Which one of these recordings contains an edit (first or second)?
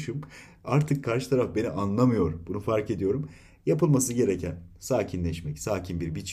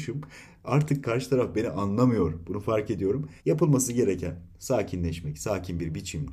second